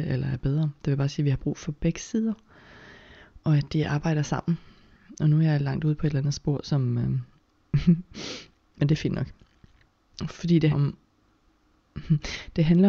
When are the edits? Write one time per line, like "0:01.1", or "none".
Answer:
0:10.7